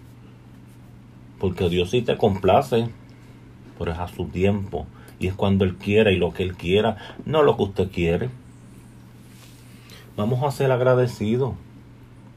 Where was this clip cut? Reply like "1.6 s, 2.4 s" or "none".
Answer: none